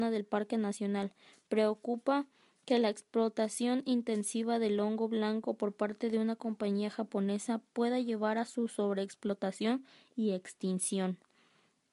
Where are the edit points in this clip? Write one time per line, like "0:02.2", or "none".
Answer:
none